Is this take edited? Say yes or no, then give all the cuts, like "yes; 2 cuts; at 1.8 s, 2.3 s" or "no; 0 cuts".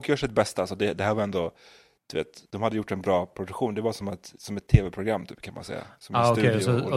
no; 0 cuts